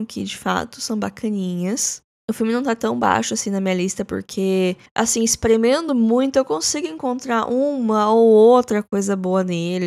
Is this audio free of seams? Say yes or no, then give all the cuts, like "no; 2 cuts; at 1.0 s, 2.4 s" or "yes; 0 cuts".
yes; 0 cuts